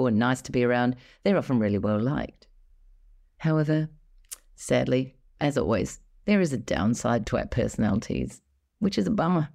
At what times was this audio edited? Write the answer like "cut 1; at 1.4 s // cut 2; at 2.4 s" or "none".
none